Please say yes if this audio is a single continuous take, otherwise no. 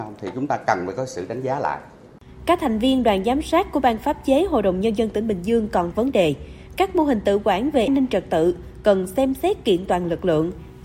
no